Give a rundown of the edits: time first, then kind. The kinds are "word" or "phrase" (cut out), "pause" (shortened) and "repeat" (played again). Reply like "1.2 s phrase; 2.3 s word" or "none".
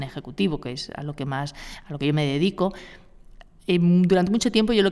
none